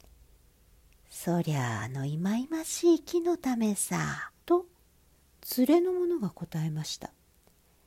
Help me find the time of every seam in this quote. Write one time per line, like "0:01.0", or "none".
0:04.4